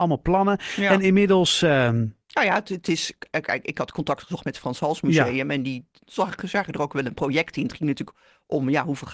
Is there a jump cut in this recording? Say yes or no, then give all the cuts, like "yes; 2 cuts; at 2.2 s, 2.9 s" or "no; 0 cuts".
yes; 1 cut; at 2.2 s